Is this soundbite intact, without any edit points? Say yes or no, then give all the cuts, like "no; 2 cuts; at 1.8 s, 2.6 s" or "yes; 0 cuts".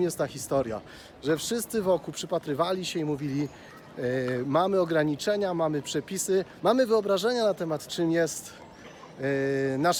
no; 2 cuts; at 6.6 s, 7.9 s